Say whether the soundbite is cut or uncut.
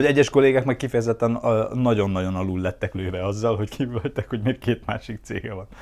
cut